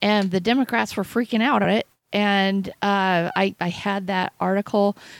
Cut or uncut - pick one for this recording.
cut